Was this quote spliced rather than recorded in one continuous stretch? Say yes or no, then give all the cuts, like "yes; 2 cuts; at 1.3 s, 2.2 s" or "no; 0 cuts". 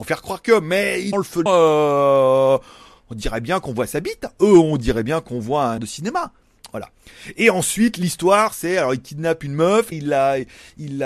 yes; 4 cuts; at 1.1 s, 1.5 s, 5.8 s, 9.9 s